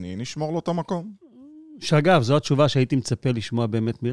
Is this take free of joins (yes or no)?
yes